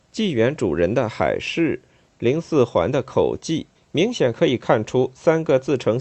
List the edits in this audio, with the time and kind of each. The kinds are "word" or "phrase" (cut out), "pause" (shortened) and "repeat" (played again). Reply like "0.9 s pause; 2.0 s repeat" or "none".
3.7 s pause